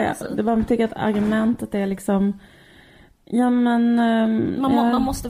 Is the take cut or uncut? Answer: uncut